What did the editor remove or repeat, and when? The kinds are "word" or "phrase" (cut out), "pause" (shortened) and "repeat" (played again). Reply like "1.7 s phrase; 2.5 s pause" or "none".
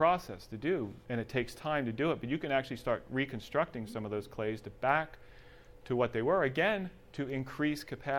1.0 s pause